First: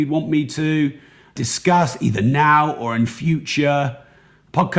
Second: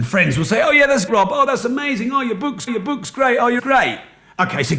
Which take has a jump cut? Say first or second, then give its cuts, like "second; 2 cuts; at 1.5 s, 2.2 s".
second; 3 cuts; at 1.1 s, 2.7 s, 3.6 s